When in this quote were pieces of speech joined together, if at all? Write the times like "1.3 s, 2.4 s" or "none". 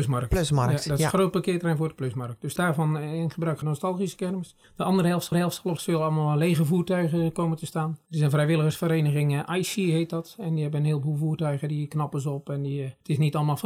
2.6 s, 3.6 s, 4.6 s, 5.3 s, 5.8 s